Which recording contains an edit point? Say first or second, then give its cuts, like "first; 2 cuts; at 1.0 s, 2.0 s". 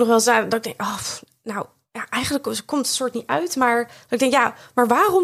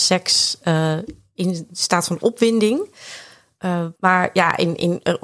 second; 1 cut; at 4.0 s